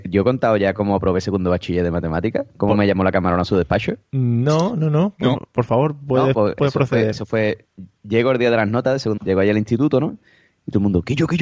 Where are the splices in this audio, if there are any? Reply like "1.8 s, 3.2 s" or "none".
9.2 s